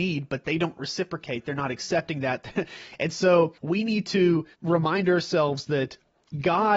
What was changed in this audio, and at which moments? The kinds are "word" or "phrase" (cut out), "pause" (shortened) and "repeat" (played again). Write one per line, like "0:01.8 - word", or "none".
0:03.6 - pause
0:04.5 - pause